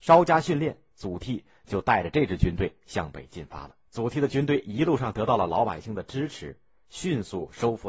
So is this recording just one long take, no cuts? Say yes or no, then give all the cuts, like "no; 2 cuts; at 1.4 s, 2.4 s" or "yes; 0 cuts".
no; 1 cut; at 3.9 s